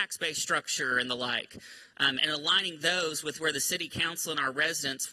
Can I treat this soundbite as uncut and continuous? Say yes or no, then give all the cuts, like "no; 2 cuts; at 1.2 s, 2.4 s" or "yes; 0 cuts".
yes; 0 cuts